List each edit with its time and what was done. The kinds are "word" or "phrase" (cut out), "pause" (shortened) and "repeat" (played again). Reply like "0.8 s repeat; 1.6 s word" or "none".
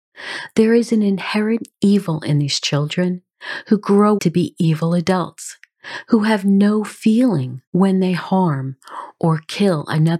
4.2 s word; 7.7 s pause